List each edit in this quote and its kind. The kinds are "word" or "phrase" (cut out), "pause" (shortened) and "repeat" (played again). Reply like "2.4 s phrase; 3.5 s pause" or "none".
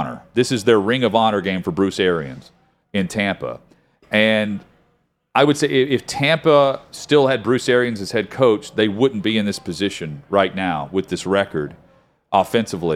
none